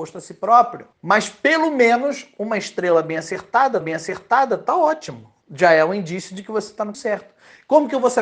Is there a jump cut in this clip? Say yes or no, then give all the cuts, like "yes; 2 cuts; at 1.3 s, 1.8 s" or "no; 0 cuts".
yes; 4 cuts; at 0.9 s, 3.8 s, 5.4 s, 6.9 s